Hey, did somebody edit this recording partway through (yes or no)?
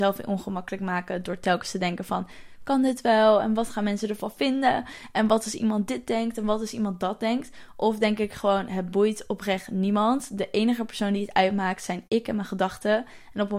no